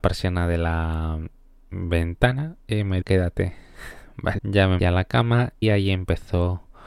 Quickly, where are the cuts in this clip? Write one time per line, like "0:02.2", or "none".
0:02.6
0:03.0
0:04.4
0:04.8
0:05.6